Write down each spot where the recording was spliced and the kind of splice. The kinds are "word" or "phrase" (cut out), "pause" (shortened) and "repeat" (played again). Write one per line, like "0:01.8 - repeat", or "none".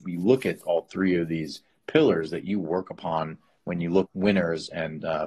0:04.1 - word